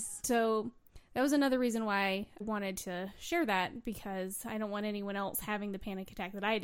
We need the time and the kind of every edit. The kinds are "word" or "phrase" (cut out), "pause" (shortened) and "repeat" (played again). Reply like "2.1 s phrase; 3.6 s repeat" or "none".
2.4 s word